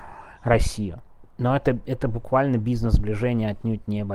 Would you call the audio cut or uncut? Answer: uncut